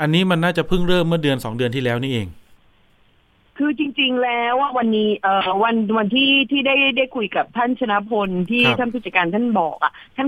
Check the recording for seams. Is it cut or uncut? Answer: uncut